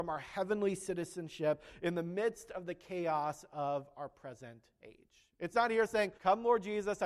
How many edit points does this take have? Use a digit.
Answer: 1